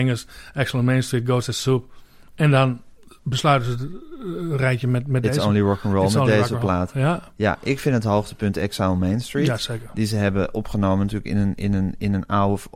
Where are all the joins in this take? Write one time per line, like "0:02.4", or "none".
none